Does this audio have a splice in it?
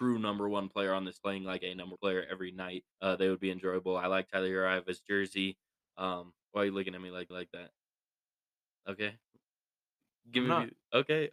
yes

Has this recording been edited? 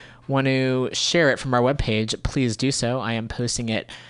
no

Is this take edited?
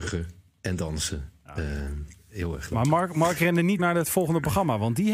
yes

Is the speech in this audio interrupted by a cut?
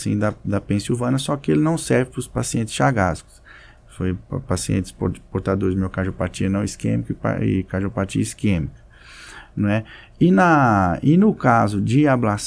no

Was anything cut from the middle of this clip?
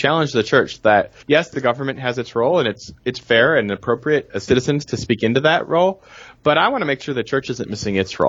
yes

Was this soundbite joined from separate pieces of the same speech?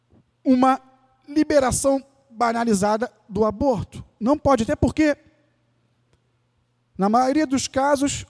no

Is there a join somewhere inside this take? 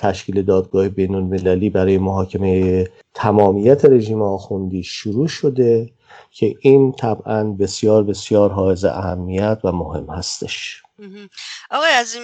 no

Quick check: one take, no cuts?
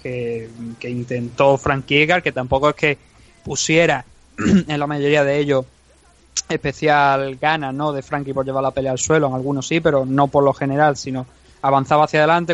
yes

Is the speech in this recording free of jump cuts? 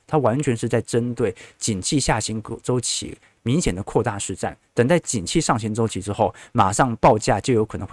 yes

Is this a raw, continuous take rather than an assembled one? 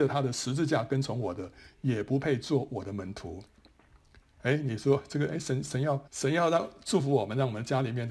no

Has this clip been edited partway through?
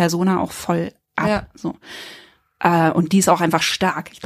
no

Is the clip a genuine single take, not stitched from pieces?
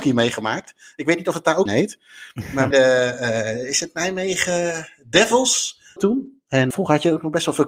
no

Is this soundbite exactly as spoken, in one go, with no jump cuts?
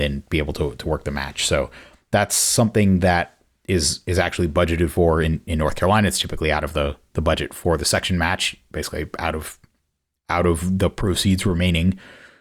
yes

